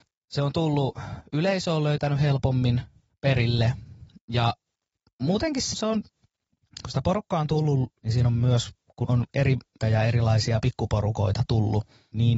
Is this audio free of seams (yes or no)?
no